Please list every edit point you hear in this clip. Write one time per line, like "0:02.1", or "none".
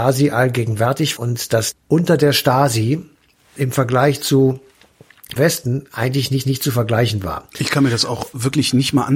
0:01.2
0:01.7
0:03.6
0:05.4
0:06.4